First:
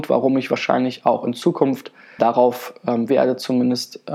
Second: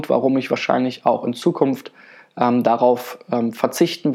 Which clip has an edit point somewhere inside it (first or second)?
first